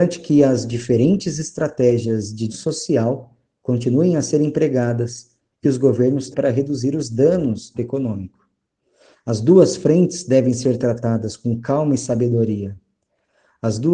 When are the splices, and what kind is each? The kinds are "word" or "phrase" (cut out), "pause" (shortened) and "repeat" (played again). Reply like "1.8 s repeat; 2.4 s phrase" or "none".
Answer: 2.5 s word; 5.6 s word; 6.3 s word; 7.7 s word